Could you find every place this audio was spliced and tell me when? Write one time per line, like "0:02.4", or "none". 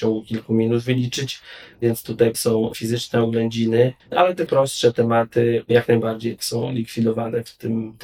0:02.3
0:04.0
0:04.5
0:06.4